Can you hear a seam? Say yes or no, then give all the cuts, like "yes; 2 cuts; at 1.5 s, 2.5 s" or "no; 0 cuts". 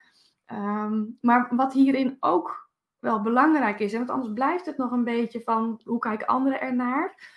yes; 1 cut; at 5.9 s